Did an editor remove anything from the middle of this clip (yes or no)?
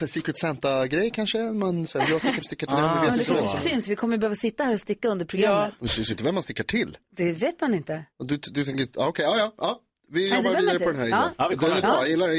yes